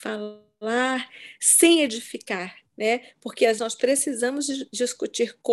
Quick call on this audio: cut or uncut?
cut